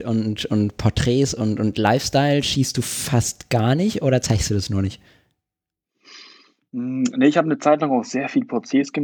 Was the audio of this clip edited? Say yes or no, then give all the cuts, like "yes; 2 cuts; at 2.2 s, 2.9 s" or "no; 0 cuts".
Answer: no; 0 cuts